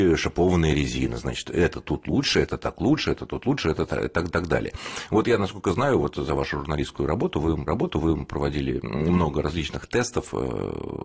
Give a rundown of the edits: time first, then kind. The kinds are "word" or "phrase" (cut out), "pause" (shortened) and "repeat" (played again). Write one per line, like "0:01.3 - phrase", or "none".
0:04.3 - repeat
0:07.7 - repeat